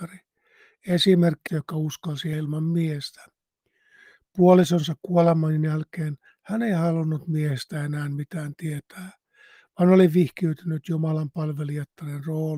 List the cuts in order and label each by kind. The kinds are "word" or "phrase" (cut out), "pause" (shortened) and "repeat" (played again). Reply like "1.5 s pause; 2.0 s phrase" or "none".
1.5 s word; 2.3 s word